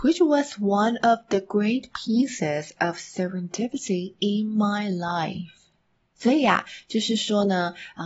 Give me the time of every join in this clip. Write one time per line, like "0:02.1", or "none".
none